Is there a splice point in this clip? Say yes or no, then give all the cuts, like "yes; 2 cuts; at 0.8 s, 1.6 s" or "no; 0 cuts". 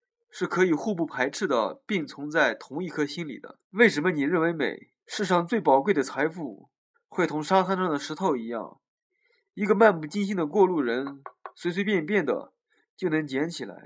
yes; 3 cuts; at 3.6 s, 5.0 s, 6.9 s